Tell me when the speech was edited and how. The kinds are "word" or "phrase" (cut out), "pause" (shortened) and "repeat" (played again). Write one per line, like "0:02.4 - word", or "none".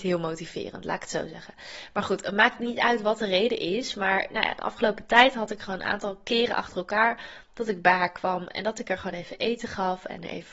none